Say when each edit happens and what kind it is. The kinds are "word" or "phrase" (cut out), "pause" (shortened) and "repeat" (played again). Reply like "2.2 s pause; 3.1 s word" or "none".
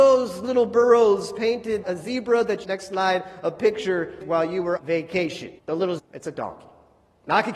1.8 s word; 2.6 s phrase; 4.2 s word; 4.8 s word; 5.6 s pause; 6.0 s word